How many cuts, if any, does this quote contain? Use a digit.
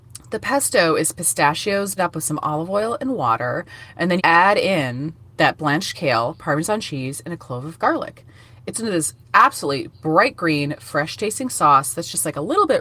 3